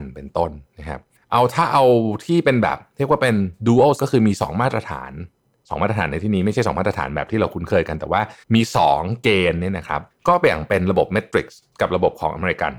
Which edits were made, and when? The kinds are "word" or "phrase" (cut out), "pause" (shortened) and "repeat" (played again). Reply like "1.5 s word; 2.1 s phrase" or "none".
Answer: 1.2 s pause; 4.0 s word; 8.4 s pause; 10.1 s pause; 11.7 s pause